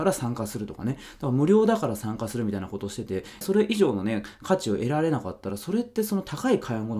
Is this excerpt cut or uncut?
cut